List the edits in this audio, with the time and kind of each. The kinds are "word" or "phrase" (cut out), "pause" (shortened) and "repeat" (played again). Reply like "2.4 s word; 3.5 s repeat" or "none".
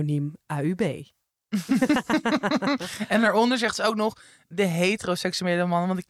none